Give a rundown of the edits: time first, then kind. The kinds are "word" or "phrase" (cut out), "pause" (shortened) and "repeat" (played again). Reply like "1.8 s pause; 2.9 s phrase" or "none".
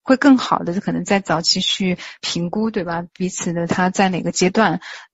none